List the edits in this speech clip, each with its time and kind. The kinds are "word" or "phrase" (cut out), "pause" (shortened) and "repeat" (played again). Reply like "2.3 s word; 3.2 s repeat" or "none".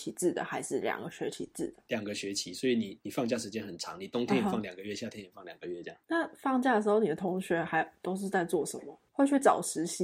6.0 s pause